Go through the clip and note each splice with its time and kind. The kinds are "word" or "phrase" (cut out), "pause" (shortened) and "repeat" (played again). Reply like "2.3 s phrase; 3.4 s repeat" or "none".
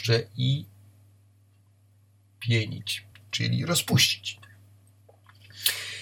none